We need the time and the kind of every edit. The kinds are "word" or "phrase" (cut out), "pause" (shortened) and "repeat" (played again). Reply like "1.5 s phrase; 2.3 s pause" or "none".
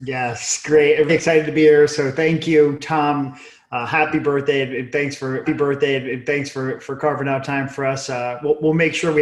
1.1 s word; 5.5 s repeat